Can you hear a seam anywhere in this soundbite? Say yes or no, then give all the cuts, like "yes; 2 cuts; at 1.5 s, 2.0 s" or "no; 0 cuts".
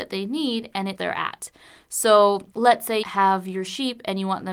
yes; 3 cuts; at 0.9 s, 2.5 s, 3.0 s